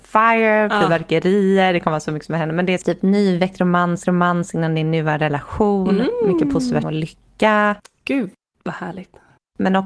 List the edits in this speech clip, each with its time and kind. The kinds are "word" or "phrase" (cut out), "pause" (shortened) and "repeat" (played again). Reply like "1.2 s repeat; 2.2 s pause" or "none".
2.8 s word; 4.0 s repeat; 6.8 s phrase